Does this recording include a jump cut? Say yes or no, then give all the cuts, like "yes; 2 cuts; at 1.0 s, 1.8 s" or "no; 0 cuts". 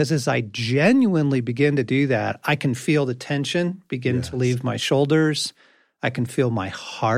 no; 0 cuts